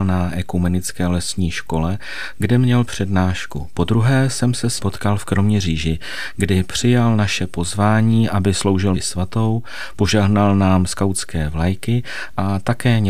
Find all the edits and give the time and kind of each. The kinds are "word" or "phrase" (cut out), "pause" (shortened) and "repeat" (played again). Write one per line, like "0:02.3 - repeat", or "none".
0:04.8 - word
0:08.9 - word